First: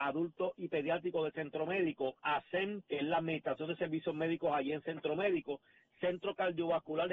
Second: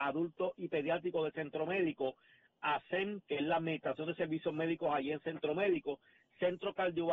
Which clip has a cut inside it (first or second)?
first